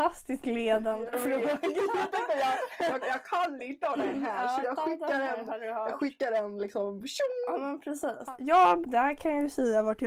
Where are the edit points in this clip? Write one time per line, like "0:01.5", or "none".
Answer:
0:03.0
0:04.6
0:08.8